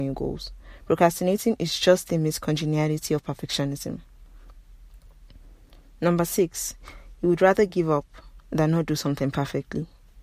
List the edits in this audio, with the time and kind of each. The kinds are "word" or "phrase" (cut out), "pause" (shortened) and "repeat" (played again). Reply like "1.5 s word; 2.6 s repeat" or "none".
none